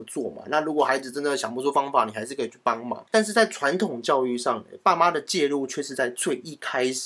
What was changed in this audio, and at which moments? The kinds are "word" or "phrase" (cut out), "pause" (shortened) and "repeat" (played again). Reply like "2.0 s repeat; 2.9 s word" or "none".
none